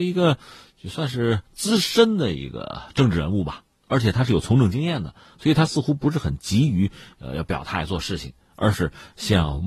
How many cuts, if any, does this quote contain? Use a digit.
0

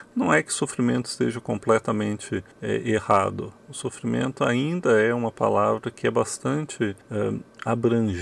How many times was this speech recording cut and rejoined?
2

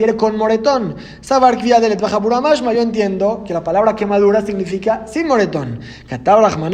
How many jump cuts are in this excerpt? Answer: 0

